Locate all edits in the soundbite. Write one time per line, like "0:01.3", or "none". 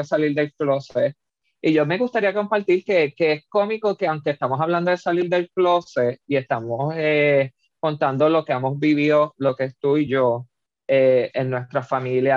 none